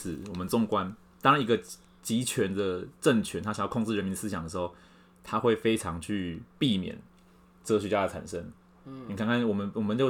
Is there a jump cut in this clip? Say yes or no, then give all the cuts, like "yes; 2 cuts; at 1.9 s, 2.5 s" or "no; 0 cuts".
no; 0 cuts